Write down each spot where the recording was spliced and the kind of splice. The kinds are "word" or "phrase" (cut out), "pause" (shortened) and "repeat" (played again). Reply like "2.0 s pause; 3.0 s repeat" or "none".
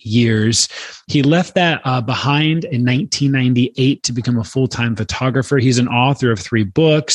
none